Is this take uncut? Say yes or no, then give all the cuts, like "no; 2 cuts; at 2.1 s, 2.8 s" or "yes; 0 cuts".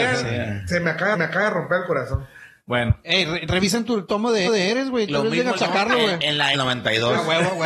no; 4 cuts; at 1.1 s, 4.5 s, 5.6 s, 6.5 s